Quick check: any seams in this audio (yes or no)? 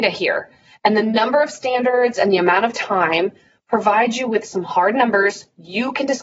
no